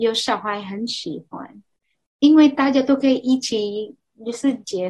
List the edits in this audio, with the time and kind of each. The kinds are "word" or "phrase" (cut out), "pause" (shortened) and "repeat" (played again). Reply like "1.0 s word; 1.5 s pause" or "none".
none